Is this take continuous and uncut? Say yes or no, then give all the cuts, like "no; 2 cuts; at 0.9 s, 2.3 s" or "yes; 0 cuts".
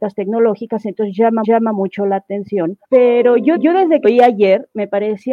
no; 4 cuts; at 1.4 s, 2.8 s, 3.6 s, 4.0 s